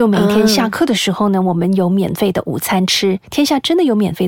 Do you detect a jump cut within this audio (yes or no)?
yes